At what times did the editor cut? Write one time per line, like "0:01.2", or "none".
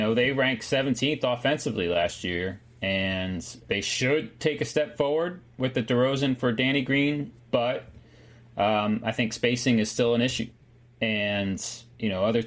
0:07.4